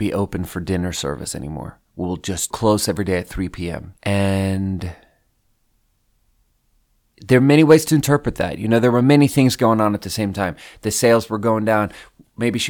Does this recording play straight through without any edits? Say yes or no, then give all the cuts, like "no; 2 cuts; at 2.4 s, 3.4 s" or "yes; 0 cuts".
no; 2 cuts; at 2.5 s, 4.0 s